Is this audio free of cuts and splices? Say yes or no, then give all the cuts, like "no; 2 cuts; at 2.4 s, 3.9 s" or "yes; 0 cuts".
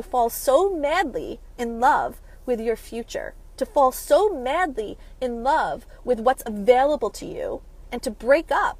yes; 0 cuts